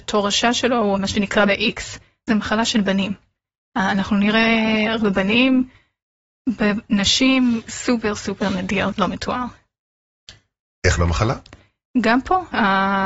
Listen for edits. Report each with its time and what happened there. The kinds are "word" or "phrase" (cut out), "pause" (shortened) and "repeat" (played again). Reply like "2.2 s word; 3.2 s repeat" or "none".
0.9 s word; 1.5 s word; 2.3 s word; 5.0 s word; 8.1 s word; 9.0 s word; 11.0 s word